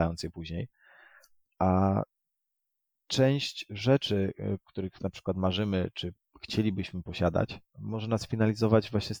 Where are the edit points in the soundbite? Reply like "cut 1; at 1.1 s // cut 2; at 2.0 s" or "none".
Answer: none